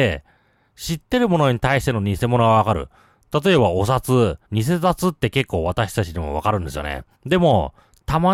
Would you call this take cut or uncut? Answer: cut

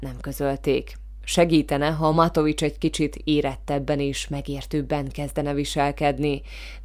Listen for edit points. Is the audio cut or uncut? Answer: uncut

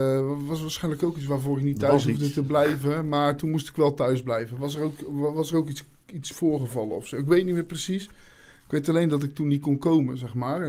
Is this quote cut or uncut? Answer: uncut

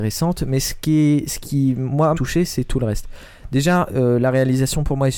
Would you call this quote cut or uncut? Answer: cut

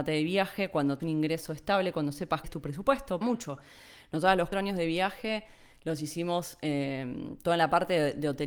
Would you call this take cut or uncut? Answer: cut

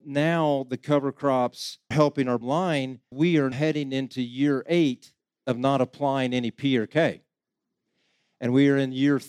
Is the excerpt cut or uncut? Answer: cut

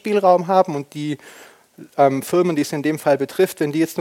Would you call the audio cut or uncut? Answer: uncut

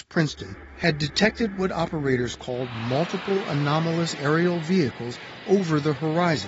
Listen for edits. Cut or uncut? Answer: uncut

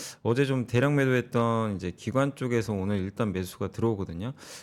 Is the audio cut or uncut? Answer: uncut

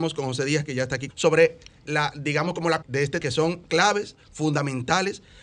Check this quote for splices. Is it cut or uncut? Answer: cut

